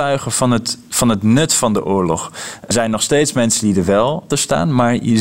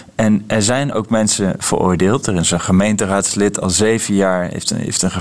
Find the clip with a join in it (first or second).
first